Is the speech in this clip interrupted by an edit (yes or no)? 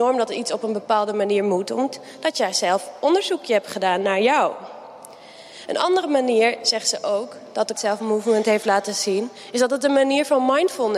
yes